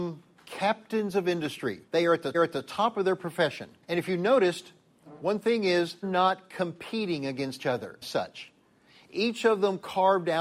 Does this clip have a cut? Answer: yes; 6 cuts; at 1.9 s, 2.3 s, 3.8 s, 6.0 s, 7.6 s, 8.0 s

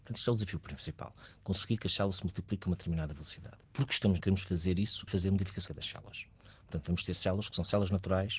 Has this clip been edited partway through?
yes; 3 cuts; at 4.2 s, 5.1 s, 5.7 s

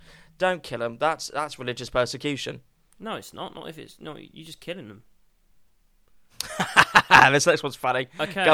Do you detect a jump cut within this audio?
no; 0 cuts

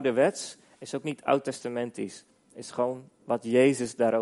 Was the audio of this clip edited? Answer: no; 0 cuts

